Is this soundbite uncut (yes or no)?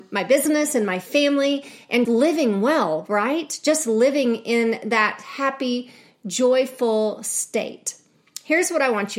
no